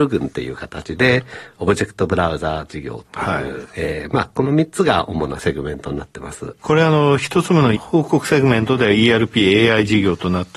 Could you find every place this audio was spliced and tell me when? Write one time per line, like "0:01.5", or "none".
0:07.8